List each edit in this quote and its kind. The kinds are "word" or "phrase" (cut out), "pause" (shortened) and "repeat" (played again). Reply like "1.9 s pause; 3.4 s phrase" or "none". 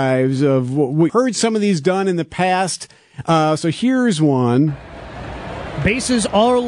1.1 s word